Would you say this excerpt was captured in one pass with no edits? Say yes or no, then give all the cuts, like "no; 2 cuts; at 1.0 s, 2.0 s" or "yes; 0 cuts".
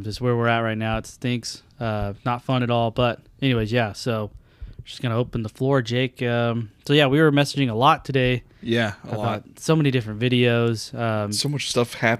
yes; 0 cuts